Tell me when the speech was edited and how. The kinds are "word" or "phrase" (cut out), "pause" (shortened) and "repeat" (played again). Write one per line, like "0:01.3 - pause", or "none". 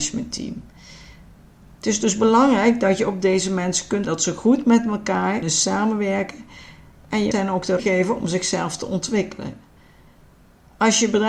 0:04.0 - word
0:05.4 - word
0:07.3 - word
0:07.8 - word